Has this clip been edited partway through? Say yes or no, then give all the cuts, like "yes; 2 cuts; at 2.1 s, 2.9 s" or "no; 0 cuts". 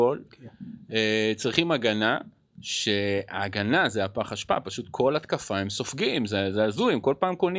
no; 0 cuts